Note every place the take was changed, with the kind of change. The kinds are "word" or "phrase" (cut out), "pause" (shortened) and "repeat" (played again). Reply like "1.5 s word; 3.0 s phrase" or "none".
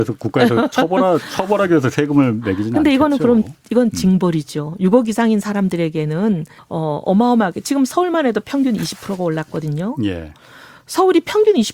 6.6 s phrase